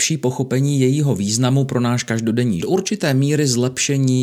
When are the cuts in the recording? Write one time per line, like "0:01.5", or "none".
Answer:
0:02.6